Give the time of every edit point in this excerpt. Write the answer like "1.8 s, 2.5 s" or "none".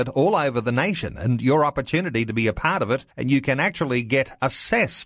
3.1 s